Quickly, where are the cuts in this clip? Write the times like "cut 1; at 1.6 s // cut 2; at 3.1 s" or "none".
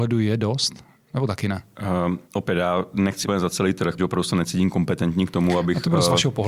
cut 1; at 2.2 s // cut 2; at 3.2 s // cut 3; at 4.0 s